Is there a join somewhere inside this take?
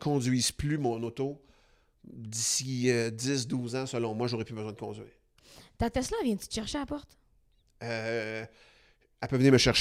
no; 0 cuts

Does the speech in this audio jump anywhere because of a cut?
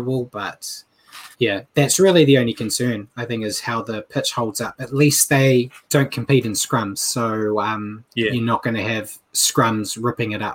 yes; 3 cuts; at 1.3 s, 5.8 s, 8.1 s

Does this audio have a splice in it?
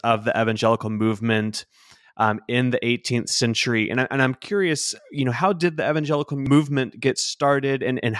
no; 0 cuts

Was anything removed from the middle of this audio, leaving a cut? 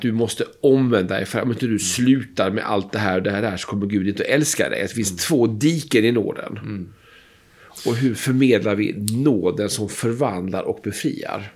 no; 0 cuts

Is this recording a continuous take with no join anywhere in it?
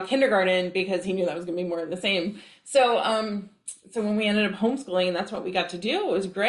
no; 1 cut; at 3.8 s

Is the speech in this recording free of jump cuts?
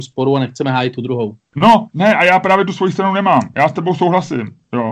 yes; 0 cuts

